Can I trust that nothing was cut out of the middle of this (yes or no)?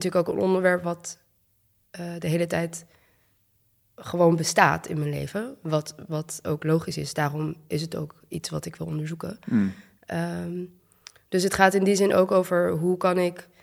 yes